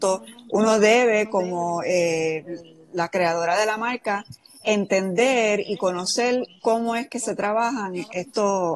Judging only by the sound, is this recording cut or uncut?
uncut